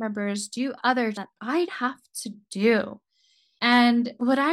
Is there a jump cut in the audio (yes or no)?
yes